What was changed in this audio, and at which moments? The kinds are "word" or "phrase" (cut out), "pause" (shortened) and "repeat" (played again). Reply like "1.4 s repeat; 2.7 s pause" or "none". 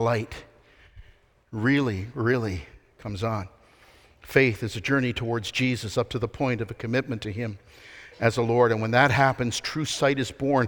none